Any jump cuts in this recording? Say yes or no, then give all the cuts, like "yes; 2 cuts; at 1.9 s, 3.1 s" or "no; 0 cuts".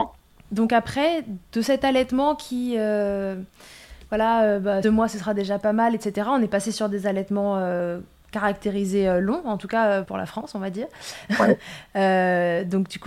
yes; 2 cuts; at 4.8 s, 10.0 s